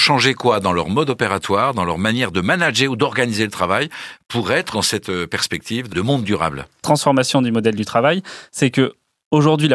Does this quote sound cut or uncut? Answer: cut